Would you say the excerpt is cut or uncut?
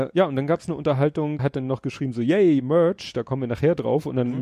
cut